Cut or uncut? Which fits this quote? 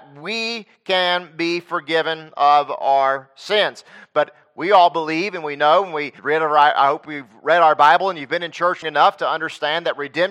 cut